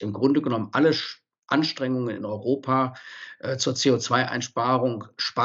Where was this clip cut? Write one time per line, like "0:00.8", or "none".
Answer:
none